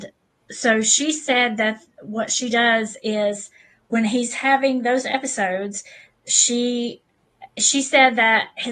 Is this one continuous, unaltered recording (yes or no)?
yes